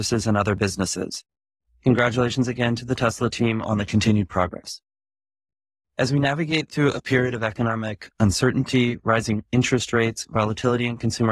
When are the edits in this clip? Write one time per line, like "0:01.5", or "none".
none